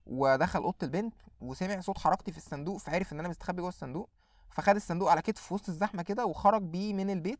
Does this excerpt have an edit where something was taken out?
no; 0 cuts

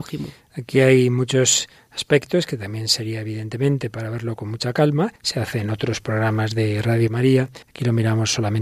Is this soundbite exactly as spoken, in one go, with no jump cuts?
no; 2 cuts; at 5.2 s, 7.6 s

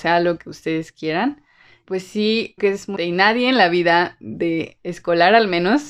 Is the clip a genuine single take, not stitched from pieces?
no; 3 cuts; at 1.8 s, 2.6 s, 3.0 s

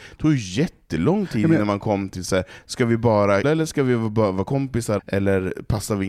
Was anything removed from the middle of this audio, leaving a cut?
yes; 2 cuts; at 3.4 s, 5.0 s

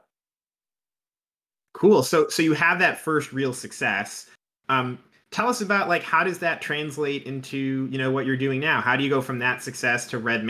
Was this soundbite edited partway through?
no; 0 cuts

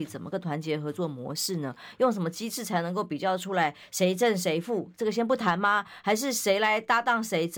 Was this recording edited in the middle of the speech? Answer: no; 0 cuts

